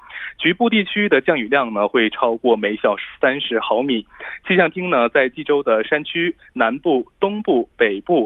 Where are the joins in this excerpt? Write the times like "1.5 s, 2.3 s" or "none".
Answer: none